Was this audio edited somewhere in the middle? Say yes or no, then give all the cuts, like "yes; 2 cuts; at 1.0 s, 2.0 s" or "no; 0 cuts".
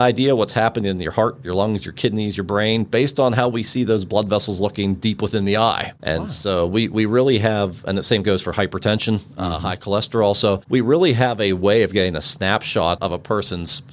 yes; 1 cut; at 13.0 s